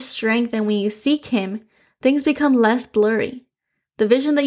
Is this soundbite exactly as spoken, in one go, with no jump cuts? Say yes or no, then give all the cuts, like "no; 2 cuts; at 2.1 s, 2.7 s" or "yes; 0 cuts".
yes; 0 cuts